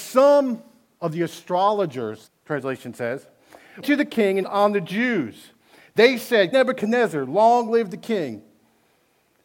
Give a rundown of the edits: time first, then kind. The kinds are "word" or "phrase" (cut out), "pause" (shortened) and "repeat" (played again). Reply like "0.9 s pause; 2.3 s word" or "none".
2.3 s word; 3.8 s word; 4.4 s word; 6.5 s word